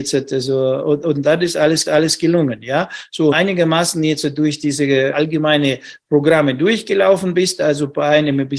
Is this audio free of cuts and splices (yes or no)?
no